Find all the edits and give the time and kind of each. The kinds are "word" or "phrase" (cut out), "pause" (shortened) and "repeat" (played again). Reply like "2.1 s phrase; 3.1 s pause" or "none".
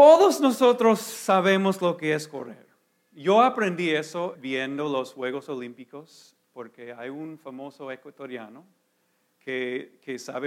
4.3 s word